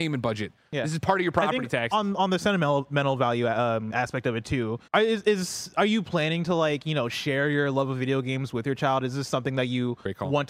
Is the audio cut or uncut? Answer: cut